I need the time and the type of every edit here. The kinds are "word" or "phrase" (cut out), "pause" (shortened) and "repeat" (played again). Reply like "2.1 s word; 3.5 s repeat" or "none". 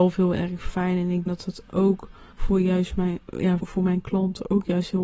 1.3 s word; 2.3 s pause; 3.6 s word